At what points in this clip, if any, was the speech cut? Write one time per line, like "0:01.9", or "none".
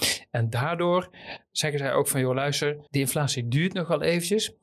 0:02.9